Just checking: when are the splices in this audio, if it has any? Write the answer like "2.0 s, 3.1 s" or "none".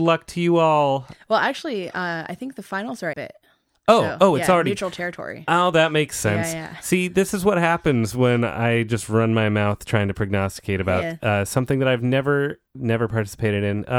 3.1 s, 12.7 s